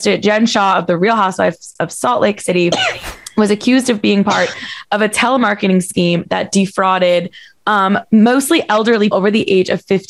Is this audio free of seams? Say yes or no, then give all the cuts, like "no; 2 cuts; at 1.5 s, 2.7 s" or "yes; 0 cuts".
no; 1 cut; at 9.1 s